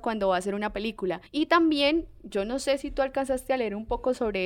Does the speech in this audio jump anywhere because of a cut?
yes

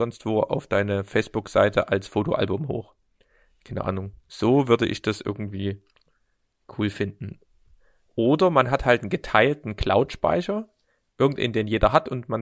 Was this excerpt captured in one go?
yes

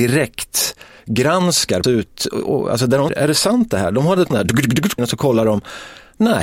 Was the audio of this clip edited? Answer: yes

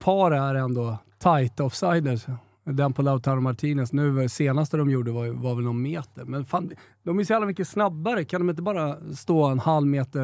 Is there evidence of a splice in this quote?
no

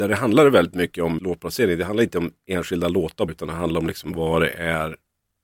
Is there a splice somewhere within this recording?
yes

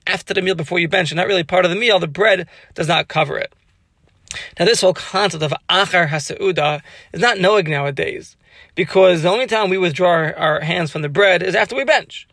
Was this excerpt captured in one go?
yes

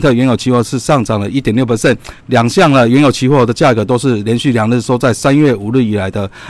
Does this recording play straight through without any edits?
no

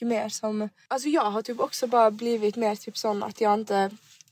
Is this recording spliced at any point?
no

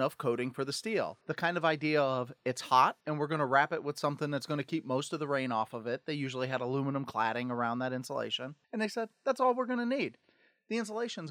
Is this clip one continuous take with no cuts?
no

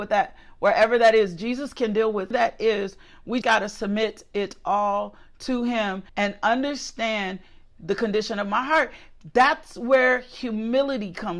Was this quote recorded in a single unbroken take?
no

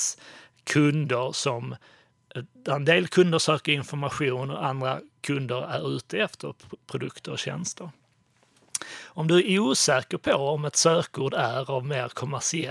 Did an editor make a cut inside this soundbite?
no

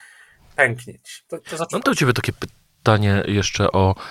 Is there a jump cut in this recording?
no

